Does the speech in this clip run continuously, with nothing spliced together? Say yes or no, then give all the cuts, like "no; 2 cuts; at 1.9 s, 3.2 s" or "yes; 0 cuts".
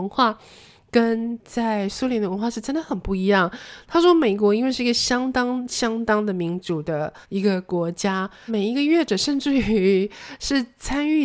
no; 2 cuts; at 7.2 s, 8.5 s